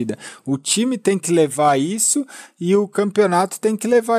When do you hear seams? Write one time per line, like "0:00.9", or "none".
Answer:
none